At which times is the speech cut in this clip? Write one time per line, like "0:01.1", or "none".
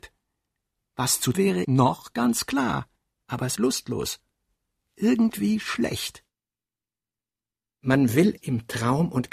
0:01.3
0:01.6
0:03.6
0:08.4